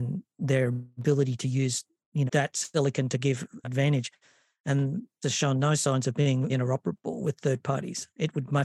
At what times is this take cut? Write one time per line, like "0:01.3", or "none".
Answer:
0:02.3
0:03.6
0:05.2
0:06.5